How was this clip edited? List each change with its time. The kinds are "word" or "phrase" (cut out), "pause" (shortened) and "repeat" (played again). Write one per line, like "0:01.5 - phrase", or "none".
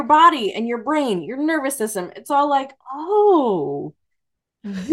0:02.8 - pause